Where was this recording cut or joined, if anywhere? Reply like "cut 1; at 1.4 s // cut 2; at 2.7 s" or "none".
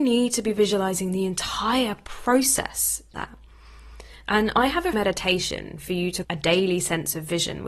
cut 1; at 3.1 s // cut 2; at 4.9 s // cut 3; at 6.2 s

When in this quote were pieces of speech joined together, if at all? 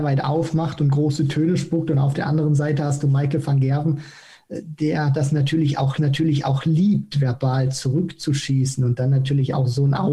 cut 1; at 6.0 s

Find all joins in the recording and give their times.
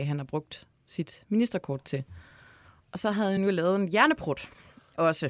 none

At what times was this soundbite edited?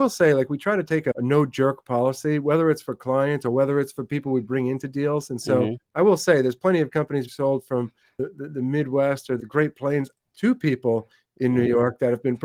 cut 1; at 5.8 s // cut 2; at 7.3 s

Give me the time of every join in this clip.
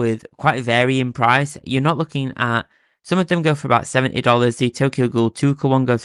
none

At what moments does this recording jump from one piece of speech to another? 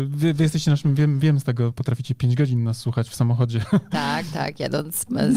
cut 1; at 1.7 s

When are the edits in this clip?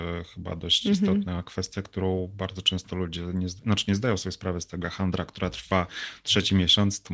cut 1; at 4.8 s

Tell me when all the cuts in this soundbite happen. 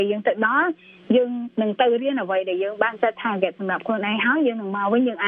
none

